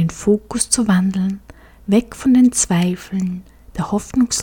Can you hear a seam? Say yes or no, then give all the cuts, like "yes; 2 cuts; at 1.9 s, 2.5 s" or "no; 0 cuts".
no; 0 cuts